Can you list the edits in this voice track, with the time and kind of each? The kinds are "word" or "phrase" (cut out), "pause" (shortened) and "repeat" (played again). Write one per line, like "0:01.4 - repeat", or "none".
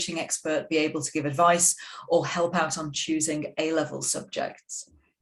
none

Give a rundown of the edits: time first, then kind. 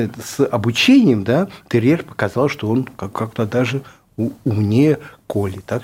none

